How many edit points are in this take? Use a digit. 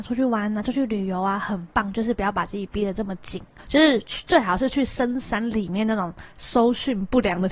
1